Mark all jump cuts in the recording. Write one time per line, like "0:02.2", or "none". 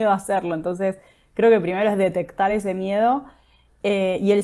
none